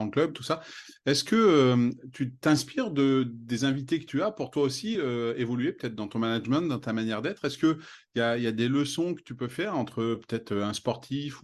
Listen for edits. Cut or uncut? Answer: uncut